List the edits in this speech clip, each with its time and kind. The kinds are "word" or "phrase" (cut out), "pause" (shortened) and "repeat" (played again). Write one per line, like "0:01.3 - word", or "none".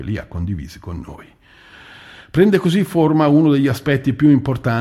none